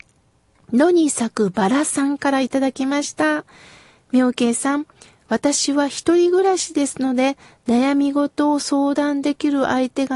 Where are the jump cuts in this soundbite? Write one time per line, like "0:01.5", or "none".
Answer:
none